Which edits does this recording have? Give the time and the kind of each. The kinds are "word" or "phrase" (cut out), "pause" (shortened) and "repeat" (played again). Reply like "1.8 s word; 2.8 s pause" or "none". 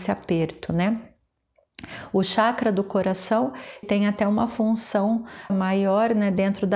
3.8 s word; 5.5 s word